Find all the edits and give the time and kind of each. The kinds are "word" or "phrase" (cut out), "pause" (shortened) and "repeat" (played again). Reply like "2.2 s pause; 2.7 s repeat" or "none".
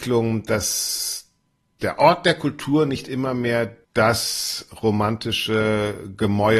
3.8 s pause